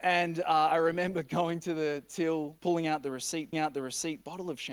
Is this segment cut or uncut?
cut